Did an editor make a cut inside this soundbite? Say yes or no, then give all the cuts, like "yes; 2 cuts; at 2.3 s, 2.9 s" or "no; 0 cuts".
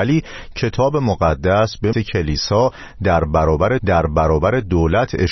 yes; 2 cuts; at 1.9 s, 3.8 s